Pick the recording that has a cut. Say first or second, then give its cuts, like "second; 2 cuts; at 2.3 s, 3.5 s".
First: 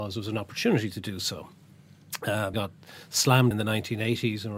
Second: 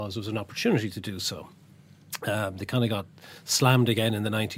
first; 2 cuts; at 2.5 s, 3.5 s